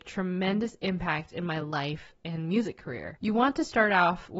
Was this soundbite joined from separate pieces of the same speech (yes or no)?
no